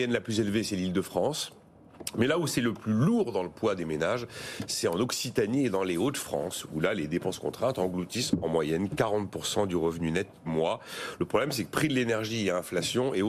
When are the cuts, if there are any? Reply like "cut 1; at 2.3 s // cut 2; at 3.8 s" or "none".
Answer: cut 1; at 10.5 s

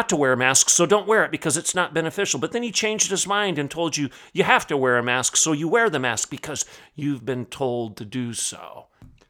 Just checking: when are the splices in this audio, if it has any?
none

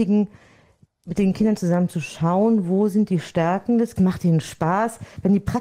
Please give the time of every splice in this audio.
cut 1; at 4.0 s

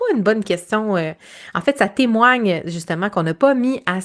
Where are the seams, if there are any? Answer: none

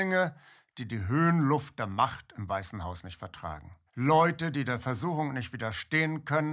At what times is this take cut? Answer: cut 1; at 3.9 s

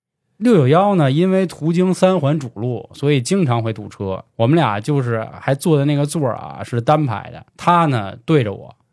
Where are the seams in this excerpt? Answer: cut 1; at 4.3 s // cut 2; at 7.5 s

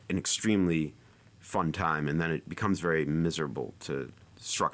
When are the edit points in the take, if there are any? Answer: none

